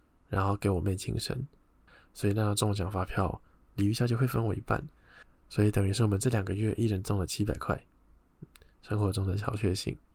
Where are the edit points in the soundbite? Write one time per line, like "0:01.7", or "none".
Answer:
none